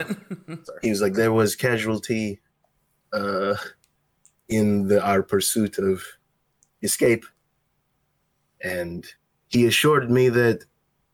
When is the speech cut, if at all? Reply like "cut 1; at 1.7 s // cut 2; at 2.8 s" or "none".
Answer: none